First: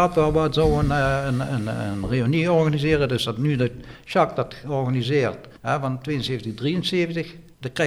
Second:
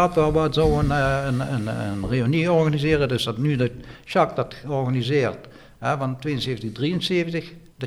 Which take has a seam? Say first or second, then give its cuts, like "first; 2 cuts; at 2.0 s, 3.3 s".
first; 1 cut; at 5.6 s